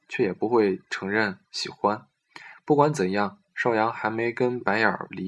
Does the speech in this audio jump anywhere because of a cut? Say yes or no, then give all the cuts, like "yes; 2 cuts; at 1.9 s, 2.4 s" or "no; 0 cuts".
no; 0 cuts